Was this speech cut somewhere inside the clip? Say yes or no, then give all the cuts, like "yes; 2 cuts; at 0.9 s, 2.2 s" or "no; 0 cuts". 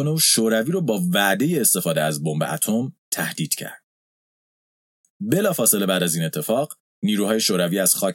no; 0 cuts